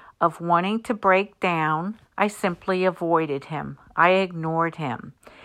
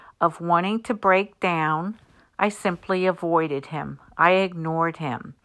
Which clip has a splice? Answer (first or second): first